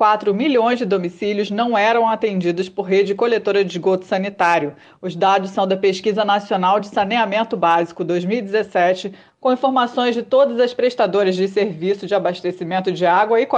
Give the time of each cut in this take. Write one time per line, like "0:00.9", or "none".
none